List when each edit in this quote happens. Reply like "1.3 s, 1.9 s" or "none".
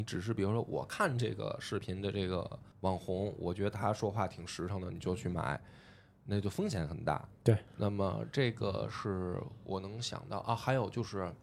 2.7 s